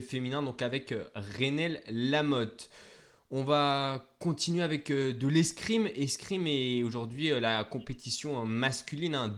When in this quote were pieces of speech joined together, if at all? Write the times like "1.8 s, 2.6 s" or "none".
none

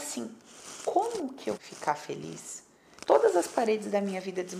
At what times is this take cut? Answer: 1.6 s, 3.0 s

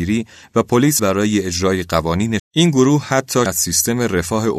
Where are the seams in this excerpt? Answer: 1.0 s, 2.4 s, 3.5 s

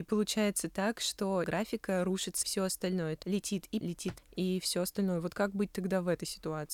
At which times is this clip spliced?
1.4 s, 2.4 s, 3.2 s, 3.8 s, 4.2 s

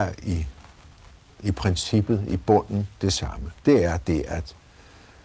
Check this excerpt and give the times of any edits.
3.6 s

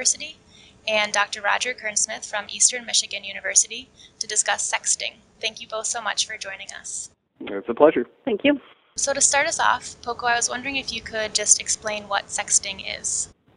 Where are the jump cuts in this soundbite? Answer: 7.3 s

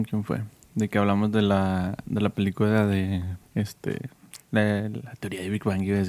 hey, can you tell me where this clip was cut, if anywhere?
3.5 s

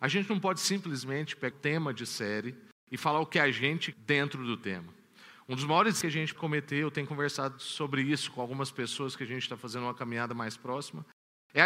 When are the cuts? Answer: 1.5 s, 3.9 s, 6.0 s, 6.4 s

